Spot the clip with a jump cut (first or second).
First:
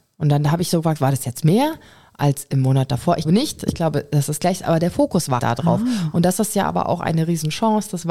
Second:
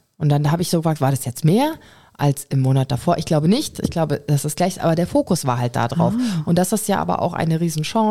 first